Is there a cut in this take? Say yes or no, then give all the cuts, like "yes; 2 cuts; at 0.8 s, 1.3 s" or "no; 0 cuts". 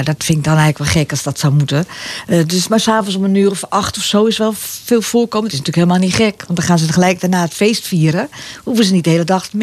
no; 0 cuts